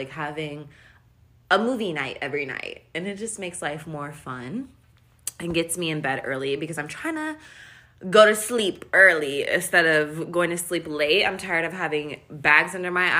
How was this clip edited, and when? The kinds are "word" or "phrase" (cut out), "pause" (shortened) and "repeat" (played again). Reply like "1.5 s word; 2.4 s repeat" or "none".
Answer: none

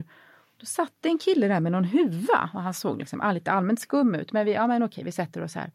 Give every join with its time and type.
none

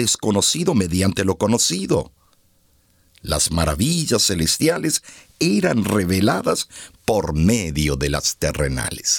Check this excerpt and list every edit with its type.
none

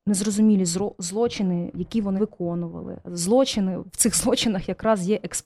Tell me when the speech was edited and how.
1.7 s word; 2.2 s word

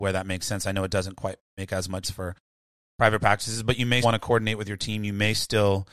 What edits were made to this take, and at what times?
1.4 s pause; 2.0 s word; 4.0 s word

